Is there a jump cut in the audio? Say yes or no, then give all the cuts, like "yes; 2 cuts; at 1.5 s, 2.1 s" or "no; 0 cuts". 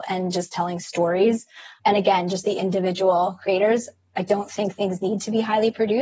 no; 0 cuts